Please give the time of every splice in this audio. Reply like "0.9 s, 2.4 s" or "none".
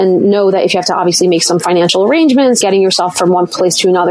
2.6 s